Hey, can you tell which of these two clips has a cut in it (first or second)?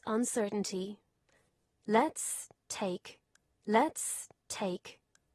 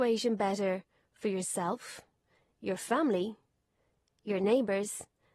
first